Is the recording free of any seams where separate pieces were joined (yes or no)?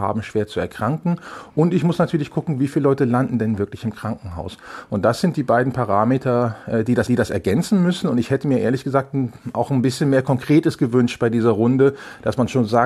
no